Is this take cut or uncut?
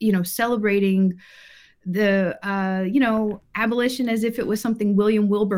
uncut